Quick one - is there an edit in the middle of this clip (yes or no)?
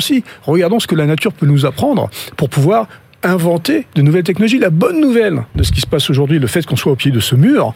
no